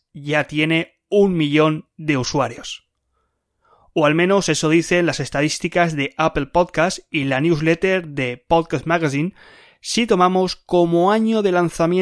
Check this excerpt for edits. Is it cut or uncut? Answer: uncut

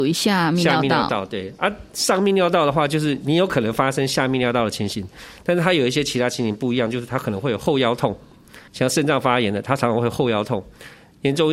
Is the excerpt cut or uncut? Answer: cut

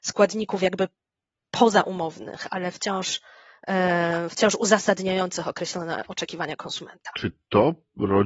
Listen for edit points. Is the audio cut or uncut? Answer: uncut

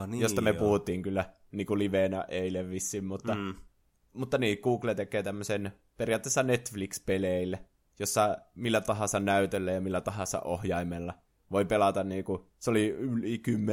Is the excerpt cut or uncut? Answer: uncut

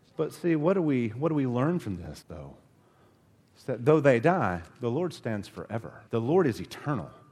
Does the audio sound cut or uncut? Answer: cut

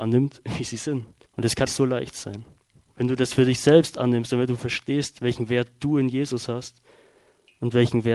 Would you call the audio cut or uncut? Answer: cut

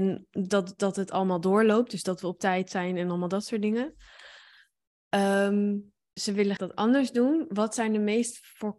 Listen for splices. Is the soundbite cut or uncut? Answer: cut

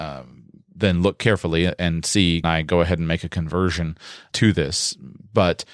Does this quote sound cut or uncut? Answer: cut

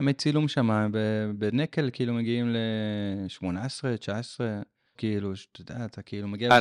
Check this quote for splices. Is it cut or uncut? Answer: cut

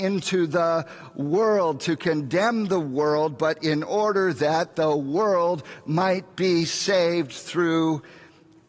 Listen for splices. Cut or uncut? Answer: uncut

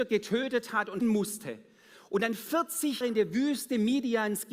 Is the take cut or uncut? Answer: cut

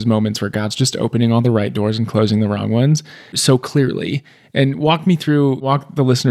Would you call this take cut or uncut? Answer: uncut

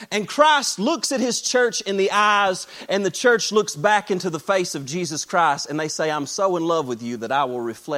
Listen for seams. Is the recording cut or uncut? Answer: uncut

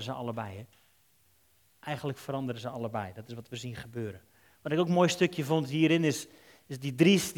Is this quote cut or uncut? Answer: uncut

